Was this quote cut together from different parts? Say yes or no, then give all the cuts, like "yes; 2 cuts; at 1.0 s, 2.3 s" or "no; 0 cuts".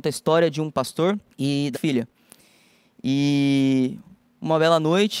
yes; 2 cuts; at 1.3 s, 1.7 s